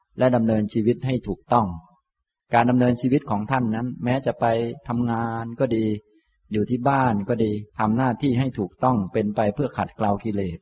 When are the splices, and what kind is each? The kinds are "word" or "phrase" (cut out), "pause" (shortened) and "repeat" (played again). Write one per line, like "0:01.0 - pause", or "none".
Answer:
0:07.7 - pause